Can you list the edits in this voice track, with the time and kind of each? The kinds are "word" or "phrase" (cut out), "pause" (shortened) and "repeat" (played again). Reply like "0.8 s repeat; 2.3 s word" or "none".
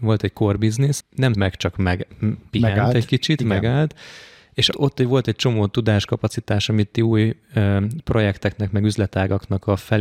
1.0 s word; 1.3 s word; 4.7 s word